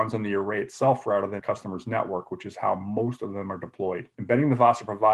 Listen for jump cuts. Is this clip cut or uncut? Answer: cut